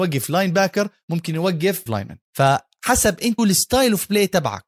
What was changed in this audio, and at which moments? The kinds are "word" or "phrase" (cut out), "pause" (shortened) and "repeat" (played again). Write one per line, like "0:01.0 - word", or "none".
0:01.9 - word
0:02.2 - pause
0:03.4 - word